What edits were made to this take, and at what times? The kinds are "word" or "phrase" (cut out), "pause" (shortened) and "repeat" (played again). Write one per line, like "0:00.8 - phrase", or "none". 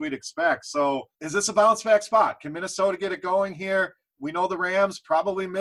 0:01.1 - pause